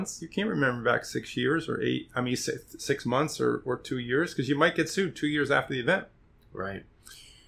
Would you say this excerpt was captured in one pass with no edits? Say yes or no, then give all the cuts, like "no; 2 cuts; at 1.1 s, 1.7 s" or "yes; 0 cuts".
yes; 0 cuts